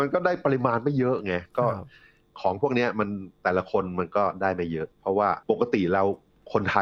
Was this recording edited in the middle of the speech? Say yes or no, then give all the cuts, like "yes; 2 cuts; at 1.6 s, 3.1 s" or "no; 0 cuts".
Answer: yes; 2 cuts; at 4.9 s, 5.4 s